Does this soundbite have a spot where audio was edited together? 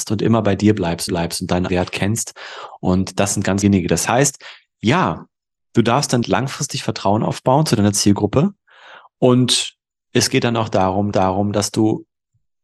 yes; 5 cuts; at 1.1 s, 1.7 s, 3.6 s, 6.2 s, 11.1 s

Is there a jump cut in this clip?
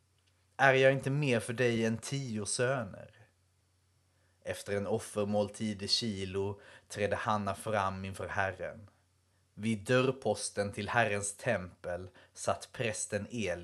no; 0 cuts

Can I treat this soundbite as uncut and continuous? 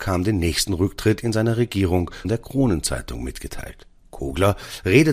no; 1 cut; at 2.2 s

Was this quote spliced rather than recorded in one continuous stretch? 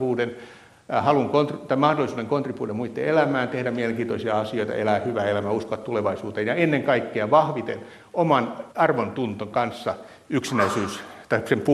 yes; 1 cut; at 8.7 s

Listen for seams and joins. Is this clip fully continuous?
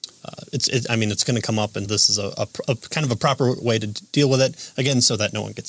no; 1 cut; at 1.9 s

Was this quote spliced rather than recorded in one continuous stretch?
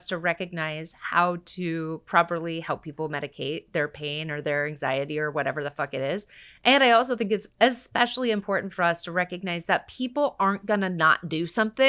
no; 0 cuts

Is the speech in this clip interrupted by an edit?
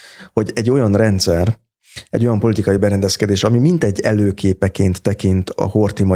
no; 0 cuts

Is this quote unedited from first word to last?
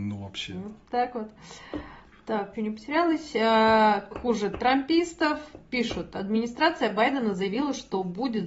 no; 2 cuts; at 2.5 s, 4.1 s

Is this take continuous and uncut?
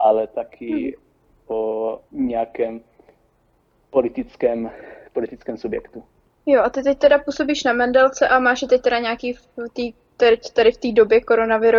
no; 2 cuts; at 2.1 s, 6.3 s

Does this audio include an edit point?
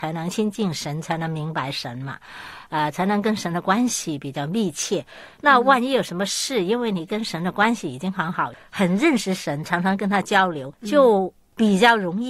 no; 0 cuts

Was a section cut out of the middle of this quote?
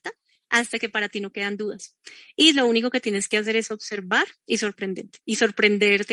no; 0 cuts

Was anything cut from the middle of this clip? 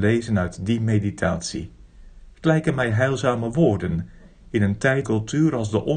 yes; 1 cut; at 5.0 s

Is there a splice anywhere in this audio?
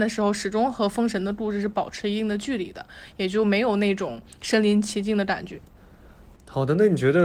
no; 0 cuts

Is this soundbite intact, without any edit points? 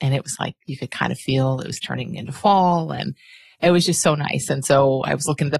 yes; 0 cuts

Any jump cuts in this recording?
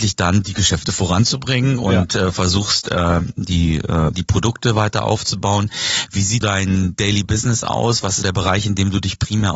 yes; 3 cuts; at 4.1 s, 6.4 s, 8.2 s

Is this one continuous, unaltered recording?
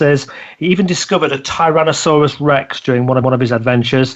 no; 1 cut; at 3.2 s

